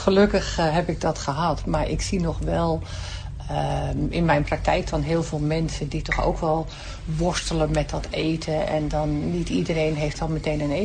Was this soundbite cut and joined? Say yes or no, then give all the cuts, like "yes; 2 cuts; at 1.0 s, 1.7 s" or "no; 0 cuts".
no; 0 cuts